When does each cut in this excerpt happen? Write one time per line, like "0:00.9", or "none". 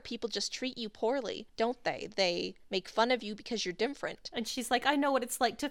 0:01.5
0:02.6